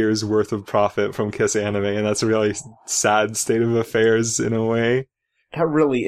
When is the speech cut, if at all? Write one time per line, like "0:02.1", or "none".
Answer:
none